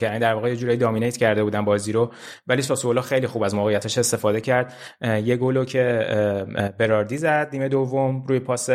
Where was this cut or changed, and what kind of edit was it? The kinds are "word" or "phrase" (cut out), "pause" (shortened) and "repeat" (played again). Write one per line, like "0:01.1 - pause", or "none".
none